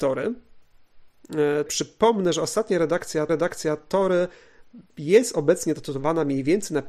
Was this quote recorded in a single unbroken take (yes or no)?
no